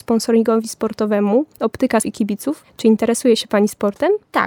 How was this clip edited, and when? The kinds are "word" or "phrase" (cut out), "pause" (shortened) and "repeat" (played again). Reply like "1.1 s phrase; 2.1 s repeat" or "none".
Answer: 2.0 s word